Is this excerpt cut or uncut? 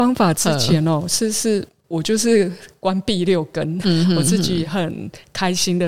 cut